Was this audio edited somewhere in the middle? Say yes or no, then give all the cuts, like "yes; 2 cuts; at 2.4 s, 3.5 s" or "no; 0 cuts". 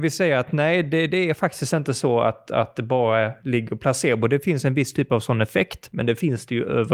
no; 0 cuts